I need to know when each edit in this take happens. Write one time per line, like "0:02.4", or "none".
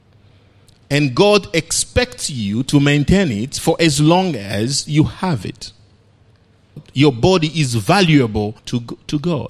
0:08.6